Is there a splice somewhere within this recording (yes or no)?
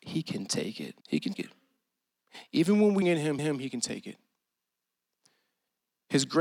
yes